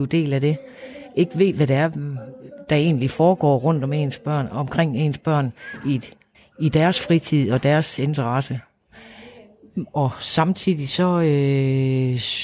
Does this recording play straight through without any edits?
no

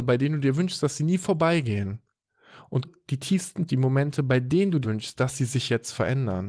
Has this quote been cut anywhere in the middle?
yes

